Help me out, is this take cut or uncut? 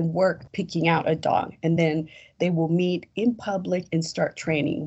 uncut